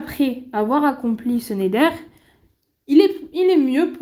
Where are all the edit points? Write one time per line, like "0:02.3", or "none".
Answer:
none